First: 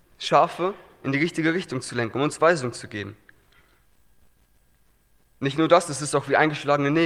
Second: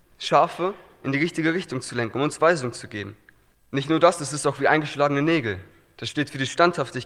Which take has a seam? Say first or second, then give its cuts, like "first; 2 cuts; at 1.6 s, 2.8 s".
second; 1 cut; at 3.5 s